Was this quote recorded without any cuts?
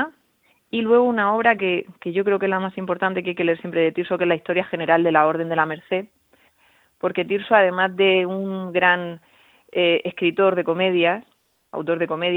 yes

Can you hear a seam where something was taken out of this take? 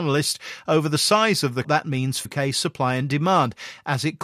yes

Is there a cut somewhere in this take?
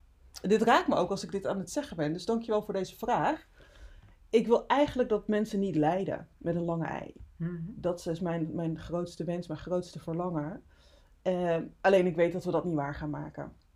no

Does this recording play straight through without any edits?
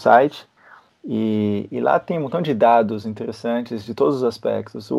yes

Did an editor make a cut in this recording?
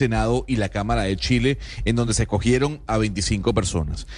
no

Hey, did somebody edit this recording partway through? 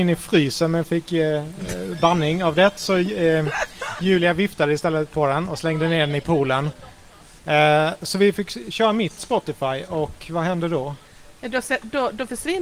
no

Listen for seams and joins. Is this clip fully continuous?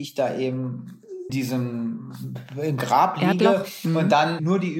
no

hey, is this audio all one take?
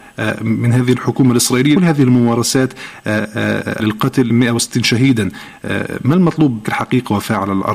no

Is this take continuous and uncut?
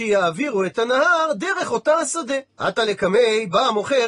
no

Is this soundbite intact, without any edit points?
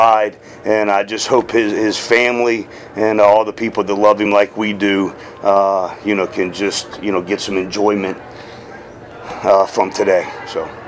yes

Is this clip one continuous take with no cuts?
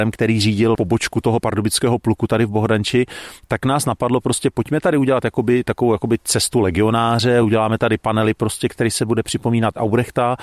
yes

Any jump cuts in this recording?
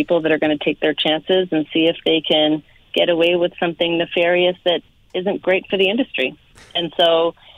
no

